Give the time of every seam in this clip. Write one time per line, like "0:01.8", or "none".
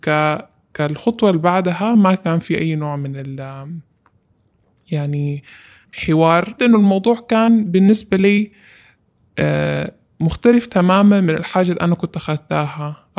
0:06.6